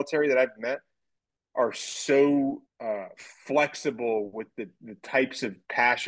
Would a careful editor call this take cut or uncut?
cut